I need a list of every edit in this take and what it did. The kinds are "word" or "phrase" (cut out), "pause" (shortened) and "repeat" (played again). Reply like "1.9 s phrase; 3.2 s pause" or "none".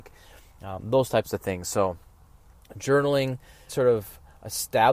3.7 s word